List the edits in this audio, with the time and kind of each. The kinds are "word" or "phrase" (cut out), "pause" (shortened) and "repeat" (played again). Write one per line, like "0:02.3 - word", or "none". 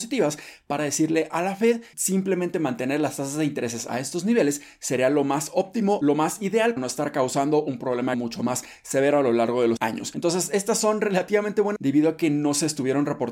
0:01.9 - word
0:06.8 - word
0:08.1 - word
0:09.8 - word
0:11.8 - word